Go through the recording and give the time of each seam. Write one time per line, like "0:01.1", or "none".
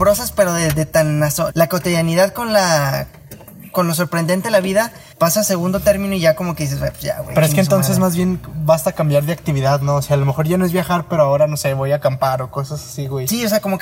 0:01.5
0:05.1